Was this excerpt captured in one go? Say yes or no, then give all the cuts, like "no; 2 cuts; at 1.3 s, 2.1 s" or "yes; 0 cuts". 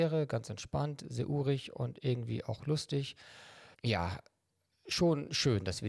no; 1 cut; at 3.7 s